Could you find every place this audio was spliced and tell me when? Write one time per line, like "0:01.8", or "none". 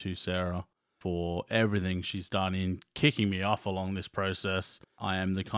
none